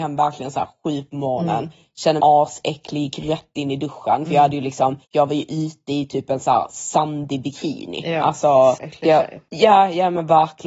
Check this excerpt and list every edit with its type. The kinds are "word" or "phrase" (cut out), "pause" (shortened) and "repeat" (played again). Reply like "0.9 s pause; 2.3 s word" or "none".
2.2 s word; 5.0 s pause; 8.8 s word